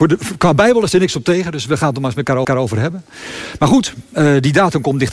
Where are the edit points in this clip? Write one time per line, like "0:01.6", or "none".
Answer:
0:02.4